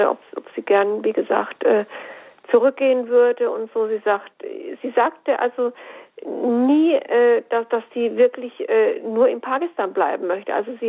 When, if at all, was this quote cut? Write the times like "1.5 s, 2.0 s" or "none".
none